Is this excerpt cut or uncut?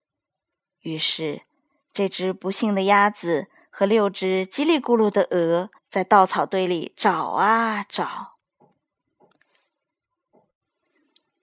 cut